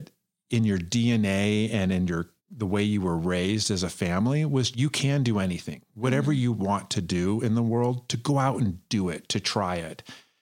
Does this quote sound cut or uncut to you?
cut